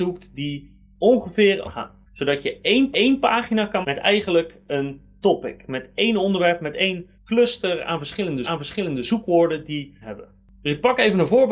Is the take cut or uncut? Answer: cut